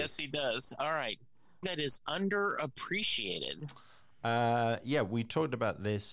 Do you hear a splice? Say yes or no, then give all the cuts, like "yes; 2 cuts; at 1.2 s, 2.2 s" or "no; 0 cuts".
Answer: yes; 1 cut; at 1.6 s